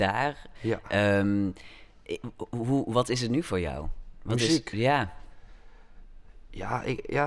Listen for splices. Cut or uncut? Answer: uncut